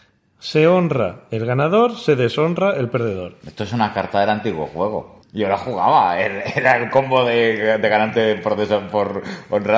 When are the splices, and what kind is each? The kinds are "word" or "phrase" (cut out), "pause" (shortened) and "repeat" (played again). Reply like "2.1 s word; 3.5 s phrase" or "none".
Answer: 5.2 s pause